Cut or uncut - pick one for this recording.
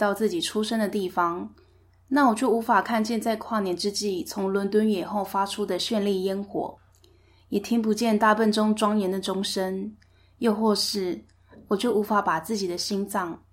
uncut